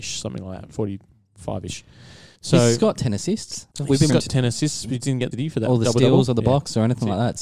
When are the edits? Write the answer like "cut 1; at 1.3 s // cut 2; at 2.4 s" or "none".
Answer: cut 1; at 2.3 s // cut 2; at 3.7 s // cut 3; at 4.1 s // cut 4; at 5.0 s // cut 5; at 5.3 s